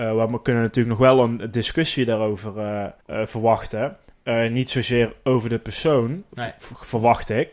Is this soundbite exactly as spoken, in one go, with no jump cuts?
no; 1 cut; at 3.0 s

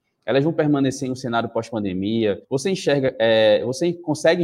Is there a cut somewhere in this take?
yes; 1 cut; at 2.4 s

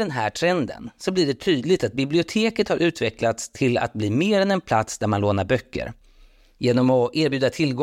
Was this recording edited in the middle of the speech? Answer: no; 0 cuts

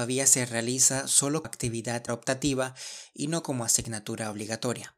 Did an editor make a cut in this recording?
yes; 2 cuts; at 1.4 s, 2.1 s

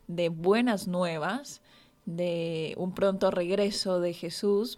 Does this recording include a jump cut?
no; 0 cuts

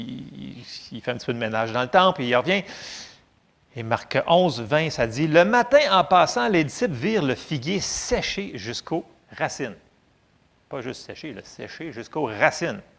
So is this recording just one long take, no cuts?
yes; 0 cuts

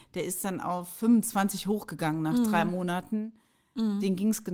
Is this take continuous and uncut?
yes; 0 cuts

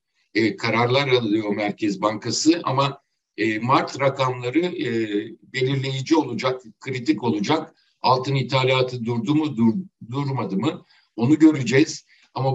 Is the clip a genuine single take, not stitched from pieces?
yes; 0 cuts

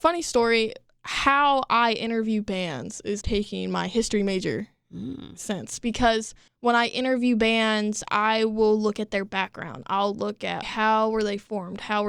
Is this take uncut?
no; 3 cuts; at 3.2 s, 6.5 s, 10.6 s

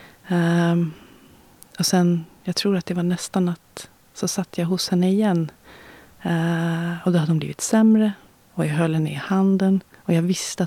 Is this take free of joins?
yes; 0 cuts

